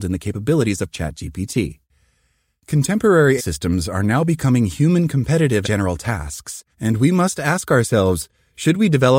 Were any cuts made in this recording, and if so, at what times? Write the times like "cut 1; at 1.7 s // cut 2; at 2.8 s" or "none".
cut 1; at 0.9 s // cut 2; at 3.4 s // cut 3; at 5.6 s // cut 4; at 6.7 s